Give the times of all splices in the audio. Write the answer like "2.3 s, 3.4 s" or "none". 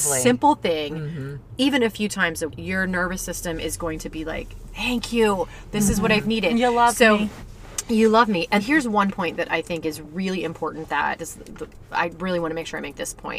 2.5 s, 8.6 s, 11.2 s